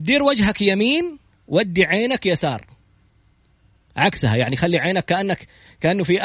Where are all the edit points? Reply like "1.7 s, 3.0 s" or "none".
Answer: none